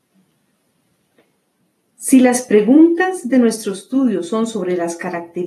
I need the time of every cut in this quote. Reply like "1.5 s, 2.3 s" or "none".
none